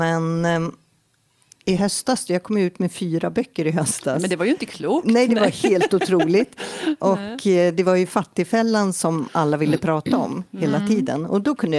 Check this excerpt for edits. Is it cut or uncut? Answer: uncut